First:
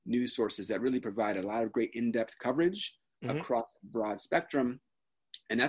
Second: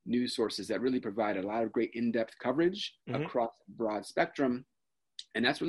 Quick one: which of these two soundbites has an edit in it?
second; 1 cut; at 3.0 s

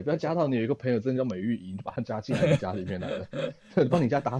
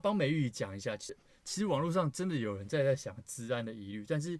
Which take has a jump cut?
second; 1 cut; at 1.1 s

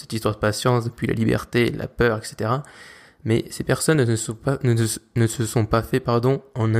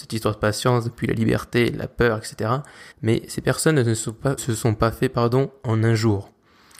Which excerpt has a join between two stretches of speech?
second; 2 cuts; at 2.9 s, 4.4 s

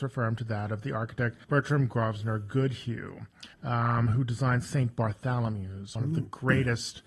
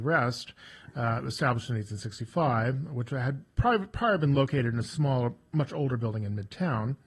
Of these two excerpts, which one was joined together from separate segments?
first; 3 cuts; at 1.4 s, 3.5 s, 6.0 s

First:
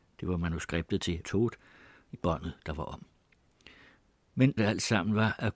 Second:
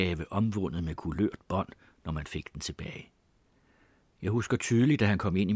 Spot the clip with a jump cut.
first; 3 cuts; at 1.2 s, 2.1 s, 4.6 s

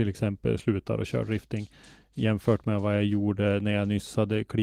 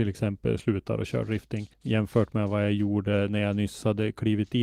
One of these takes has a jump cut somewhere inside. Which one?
second; 1 cut; at 1.7 s

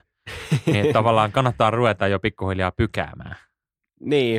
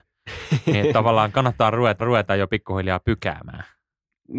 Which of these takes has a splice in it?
second; 1 cut; at 2.0 s

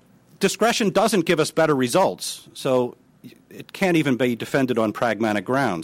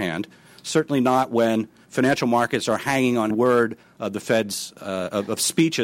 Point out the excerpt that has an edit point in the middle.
second; 1 cut; at 3.3 s

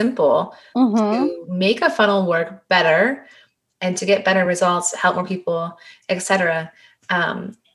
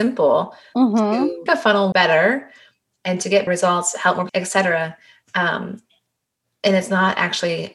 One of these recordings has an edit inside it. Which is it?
second; 4 cuts; at 1.5 s, 1.9 s, 3.5 s, 4.3 s

